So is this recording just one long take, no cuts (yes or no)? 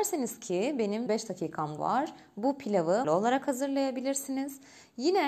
no